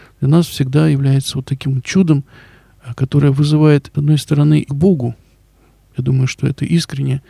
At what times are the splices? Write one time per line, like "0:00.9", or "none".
0:03.9
0:04.7